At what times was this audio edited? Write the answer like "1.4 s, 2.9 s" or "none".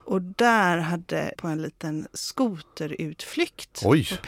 1.3 s